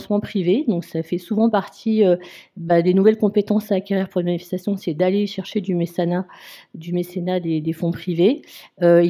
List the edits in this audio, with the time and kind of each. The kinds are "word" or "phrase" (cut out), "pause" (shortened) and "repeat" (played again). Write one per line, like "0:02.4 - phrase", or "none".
none